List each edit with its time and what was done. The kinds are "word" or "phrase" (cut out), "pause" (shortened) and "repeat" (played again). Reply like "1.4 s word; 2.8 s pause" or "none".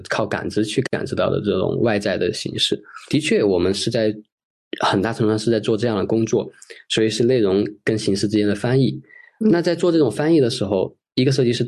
none